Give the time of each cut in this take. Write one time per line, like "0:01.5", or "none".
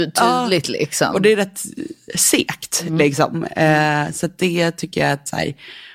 none